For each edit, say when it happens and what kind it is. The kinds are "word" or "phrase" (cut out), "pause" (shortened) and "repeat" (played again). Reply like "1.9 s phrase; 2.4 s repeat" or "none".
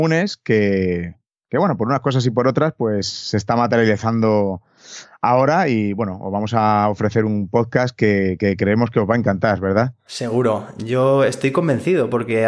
none